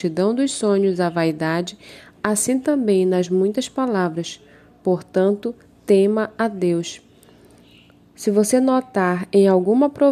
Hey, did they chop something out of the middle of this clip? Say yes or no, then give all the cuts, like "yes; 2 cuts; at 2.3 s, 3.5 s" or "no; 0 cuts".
no; 0 cuts